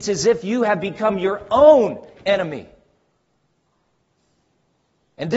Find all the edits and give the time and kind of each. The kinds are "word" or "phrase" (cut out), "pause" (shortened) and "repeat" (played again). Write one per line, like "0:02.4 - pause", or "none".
none